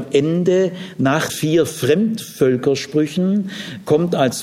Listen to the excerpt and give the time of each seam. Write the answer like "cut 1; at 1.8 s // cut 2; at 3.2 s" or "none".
cut 1; at 1.3 s